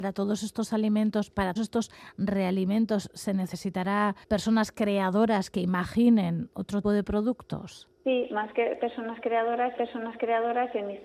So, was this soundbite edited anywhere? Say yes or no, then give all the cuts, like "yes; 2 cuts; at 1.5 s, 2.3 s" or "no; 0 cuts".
yes; 5 cuts; at 1.6 s, 4.2 s, 6.8 s, 8.0 s, 9.8 s